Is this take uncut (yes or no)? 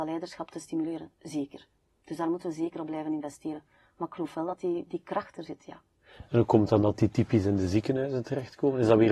no